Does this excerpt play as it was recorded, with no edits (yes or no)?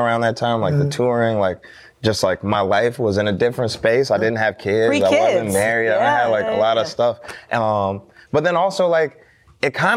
yes